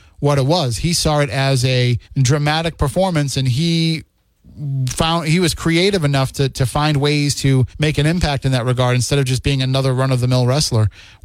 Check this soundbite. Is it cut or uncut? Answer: cut